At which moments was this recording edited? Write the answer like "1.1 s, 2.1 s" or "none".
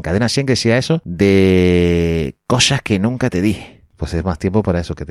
none